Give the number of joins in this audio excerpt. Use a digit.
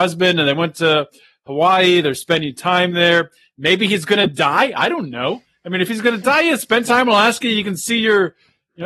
0